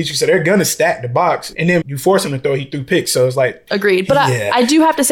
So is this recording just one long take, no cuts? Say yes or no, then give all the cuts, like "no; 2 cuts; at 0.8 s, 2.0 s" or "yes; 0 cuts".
no; 1 cut; at 1.8 s